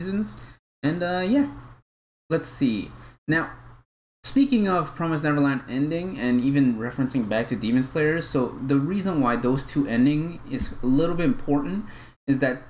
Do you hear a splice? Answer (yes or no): no